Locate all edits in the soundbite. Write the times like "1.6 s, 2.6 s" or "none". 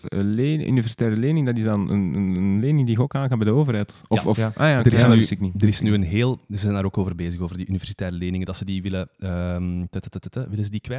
none